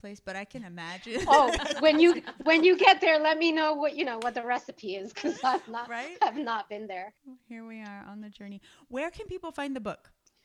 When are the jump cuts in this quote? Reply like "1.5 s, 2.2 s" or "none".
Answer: 1.7 s, 7.2 s